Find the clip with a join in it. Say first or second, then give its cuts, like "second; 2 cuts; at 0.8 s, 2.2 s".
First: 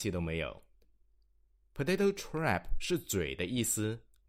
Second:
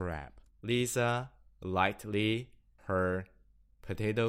second; 1 cut; at 2.8 s